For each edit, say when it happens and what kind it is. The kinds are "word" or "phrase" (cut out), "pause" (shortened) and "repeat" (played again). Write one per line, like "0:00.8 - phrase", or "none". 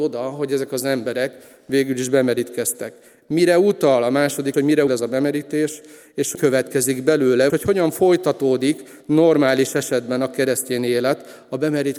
0:04.5 - word
0:04.9 - word
0:06.3 - word
0:07.5 - word